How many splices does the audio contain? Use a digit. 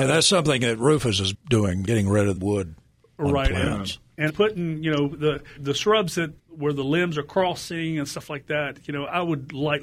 6